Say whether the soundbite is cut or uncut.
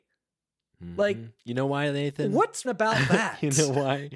cut